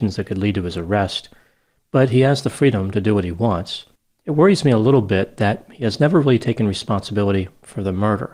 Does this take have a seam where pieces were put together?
no; 0 cuts

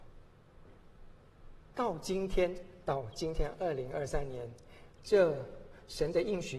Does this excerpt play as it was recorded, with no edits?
no; 1 cut; at 1.7 s

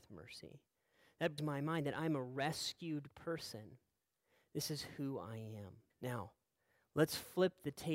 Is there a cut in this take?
yes; 2 cuts; at 1.4 s, 5.9 s

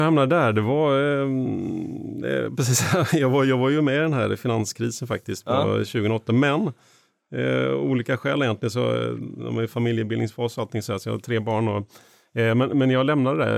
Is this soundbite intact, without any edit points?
yes; 0 cuts

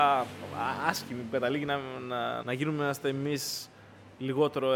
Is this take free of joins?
no; 1 cut; at 2.4 s

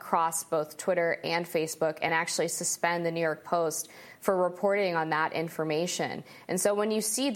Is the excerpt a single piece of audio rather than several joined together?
yes; 0 cuts

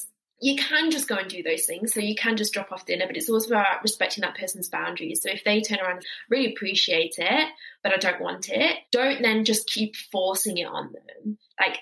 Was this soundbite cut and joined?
yes; 3 cuts; at 6.0 s, 7.8 s, 8.8 s

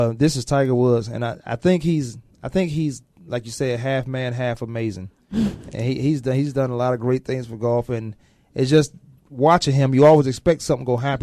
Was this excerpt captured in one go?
yes; 0 cuts

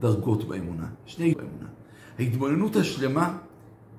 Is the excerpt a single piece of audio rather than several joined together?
no; 1 cut; at 1.3 s

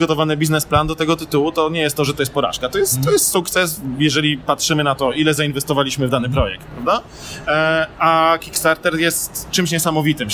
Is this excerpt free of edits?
yes; 0 cuts

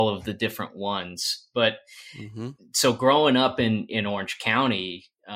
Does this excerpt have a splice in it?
no; 0 cuts

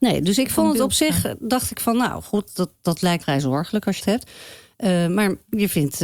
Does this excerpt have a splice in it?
yes; 4 cuts; at 2.5 s, 2.8 s, 3.2 s, 4.0 s

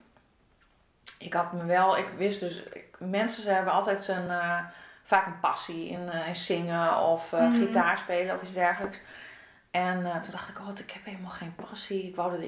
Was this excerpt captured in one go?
yes; 0 cuts

